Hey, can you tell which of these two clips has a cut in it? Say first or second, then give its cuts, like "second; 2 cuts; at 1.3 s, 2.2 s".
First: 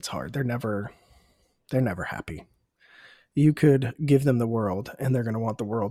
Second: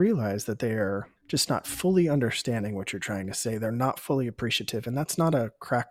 second; 1 cut; at 1.2 s